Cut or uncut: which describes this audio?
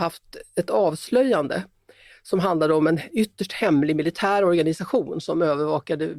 uncut